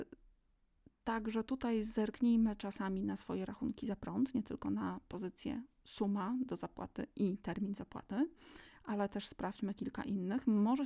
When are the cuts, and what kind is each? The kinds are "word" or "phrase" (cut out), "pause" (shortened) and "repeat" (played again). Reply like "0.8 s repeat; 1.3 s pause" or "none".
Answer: 5.7 s pause